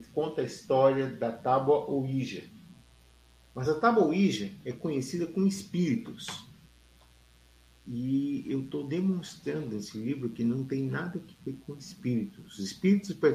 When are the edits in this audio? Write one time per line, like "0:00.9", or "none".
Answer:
none